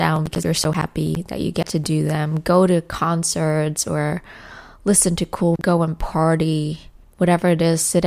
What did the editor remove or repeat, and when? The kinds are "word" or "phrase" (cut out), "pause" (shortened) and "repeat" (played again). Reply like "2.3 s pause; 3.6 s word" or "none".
5.6 s word